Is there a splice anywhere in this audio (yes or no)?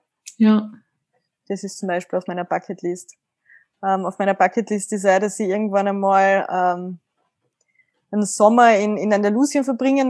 no